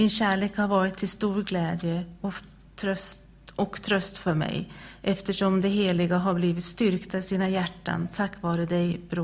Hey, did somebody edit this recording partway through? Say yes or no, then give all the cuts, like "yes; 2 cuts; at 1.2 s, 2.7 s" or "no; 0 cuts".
no; 0 cuts